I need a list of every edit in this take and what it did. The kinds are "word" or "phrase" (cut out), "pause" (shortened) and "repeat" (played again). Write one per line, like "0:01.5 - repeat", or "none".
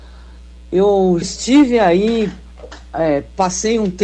0:01.2 - word